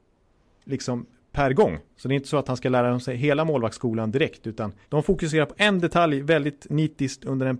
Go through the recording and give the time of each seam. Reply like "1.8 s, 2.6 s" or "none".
4.8 s